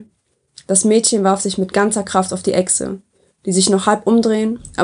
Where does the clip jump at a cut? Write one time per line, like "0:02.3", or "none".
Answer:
none